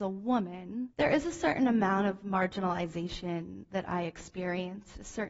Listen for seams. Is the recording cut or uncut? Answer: cut